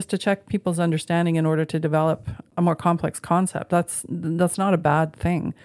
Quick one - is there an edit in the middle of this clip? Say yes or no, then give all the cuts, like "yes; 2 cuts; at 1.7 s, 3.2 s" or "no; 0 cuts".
no; 0 cuts